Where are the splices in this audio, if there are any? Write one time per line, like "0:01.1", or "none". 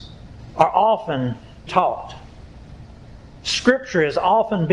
0:01.7

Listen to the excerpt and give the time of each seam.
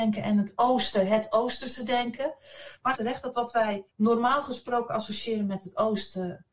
0:02.9
0:03.9

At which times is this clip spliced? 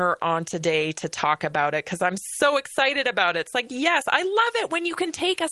none

